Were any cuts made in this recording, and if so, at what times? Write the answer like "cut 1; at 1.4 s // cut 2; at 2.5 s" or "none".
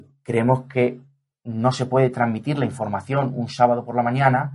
none